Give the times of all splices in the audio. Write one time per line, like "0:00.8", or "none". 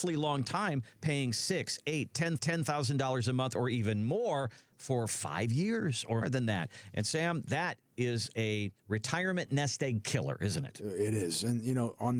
0:02.4
0:06.2
0:08.8